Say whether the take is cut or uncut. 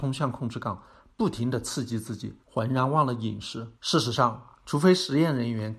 cut